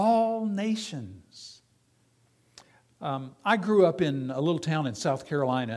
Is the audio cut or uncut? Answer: uncut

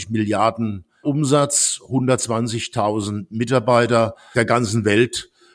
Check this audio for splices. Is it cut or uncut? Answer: cut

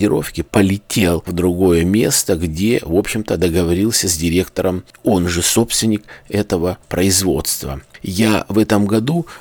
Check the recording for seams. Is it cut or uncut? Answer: uncut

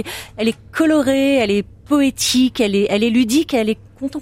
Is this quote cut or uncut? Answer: uncut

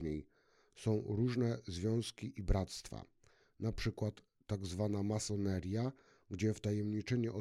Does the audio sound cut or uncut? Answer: uncut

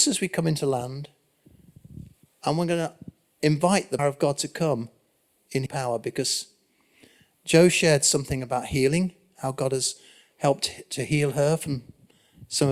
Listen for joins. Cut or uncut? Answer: cut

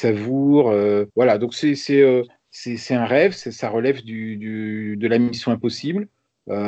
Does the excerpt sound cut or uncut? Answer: cut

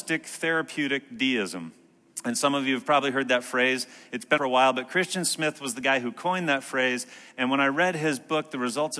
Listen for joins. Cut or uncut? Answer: cut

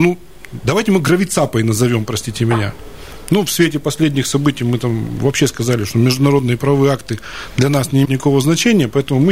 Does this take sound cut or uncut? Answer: cut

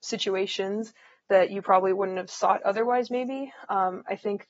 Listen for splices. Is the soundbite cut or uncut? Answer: cut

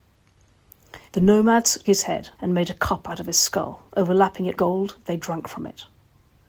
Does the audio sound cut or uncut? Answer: cut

